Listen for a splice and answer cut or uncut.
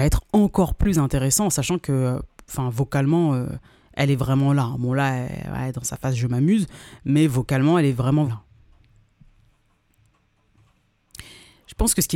cut